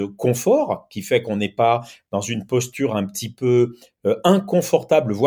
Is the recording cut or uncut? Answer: uncut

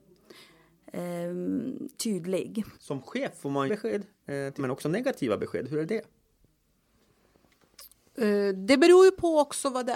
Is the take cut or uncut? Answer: cut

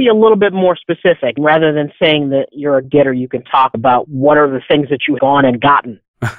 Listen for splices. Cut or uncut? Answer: cut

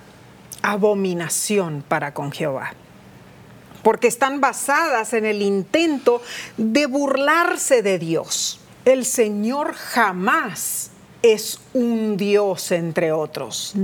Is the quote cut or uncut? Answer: cut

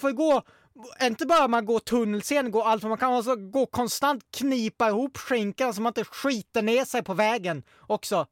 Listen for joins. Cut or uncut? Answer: uncut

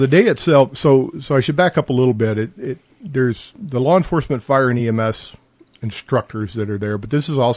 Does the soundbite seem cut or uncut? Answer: uncut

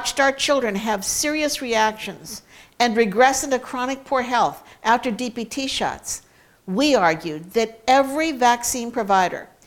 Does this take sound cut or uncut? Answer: uncut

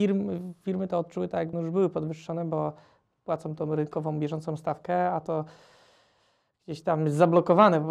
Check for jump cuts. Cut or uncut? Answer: cut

